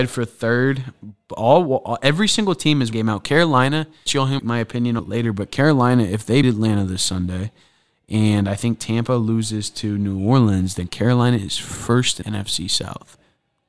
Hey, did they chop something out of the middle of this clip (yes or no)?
yes